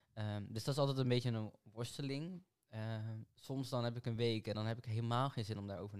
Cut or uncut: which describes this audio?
uncut